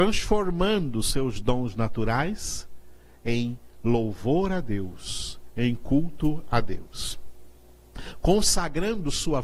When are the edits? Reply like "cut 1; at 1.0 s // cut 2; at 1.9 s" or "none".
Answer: none